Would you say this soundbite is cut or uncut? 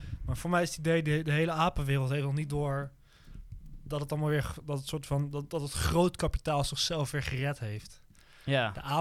uncut